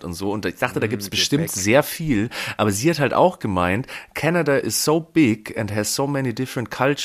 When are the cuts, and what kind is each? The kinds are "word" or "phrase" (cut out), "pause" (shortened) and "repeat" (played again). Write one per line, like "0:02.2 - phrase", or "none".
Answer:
none